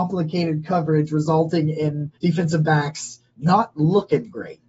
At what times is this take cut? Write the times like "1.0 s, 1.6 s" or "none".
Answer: 2.1 s, 3.3 s